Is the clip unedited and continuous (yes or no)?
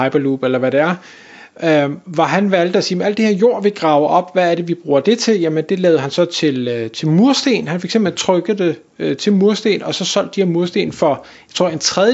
yes